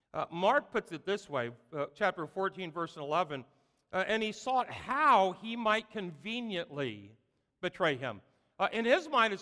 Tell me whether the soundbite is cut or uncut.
uncut